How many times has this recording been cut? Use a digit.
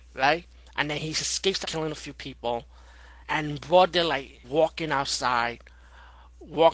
3